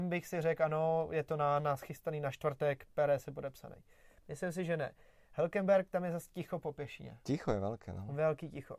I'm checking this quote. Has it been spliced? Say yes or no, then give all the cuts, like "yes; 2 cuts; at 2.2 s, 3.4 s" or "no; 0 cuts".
no; 0 cuts